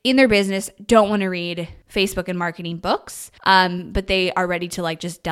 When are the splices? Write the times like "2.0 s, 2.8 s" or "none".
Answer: 1.8 s, 3.4 s